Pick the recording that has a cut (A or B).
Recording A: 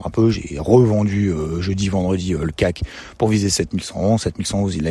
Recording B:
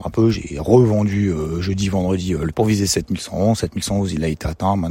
B